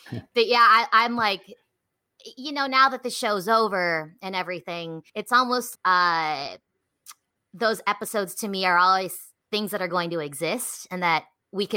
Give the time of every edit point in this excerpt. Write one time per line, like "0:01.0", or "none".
0:05.1
0:05.7
0:09.4